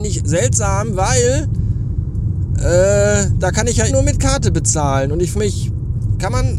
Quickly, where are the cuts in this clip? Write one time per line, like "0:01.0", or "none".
0:03.9
0:05.3